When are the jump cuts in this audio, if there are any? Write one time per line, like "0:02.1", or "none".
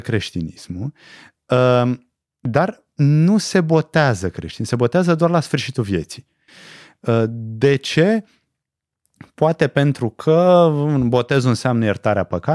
none